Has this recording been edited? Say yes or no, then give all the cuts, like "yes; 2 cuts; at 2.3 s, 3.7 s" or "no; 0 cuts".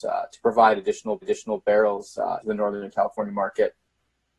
yes; 2 cuts; at 1.2 s, 2.4 s